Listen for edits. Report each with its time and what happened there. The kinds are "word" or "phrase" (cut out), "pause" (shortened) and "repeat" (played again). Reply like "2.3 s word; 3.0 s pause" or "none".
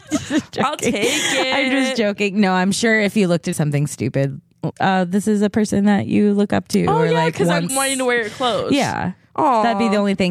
3.5 s phrase; 4.7 s word; 7.7 s word